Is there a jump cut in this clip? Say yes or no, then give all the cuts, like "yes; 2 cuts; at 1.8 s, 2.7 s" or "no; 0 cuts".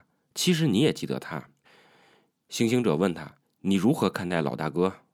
yes; 2 cuts; at 1.6 s, 3.4 s